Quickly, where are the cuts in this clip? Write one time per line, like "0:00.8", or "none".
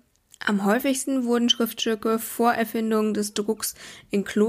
none